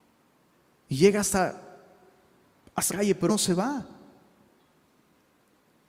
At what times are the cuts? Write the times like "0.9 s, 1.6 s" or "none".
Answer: 2.9 s, 3.3 s